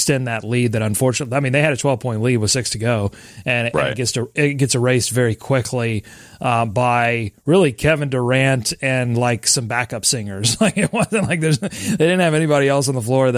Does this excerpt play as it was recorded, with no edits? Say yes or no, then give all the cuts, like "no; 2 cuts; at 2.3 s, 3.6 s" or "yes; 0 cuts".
yes; 0 cuts